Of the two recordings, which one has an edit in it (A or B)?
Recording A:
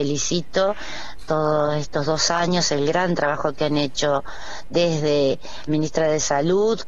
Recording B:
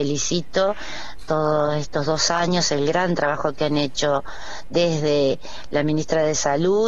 A